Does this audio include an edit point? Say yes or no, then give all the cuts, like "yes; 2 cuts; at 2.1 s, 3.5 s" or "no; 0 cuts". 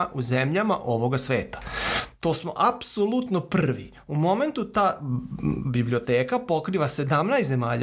no; 0 cuts